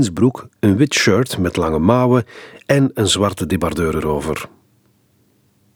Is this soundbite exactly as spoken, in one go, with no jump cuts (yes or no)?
yes